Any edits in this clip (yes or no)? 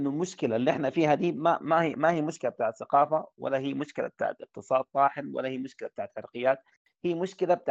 no